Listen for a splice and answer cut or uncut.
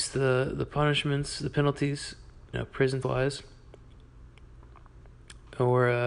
cut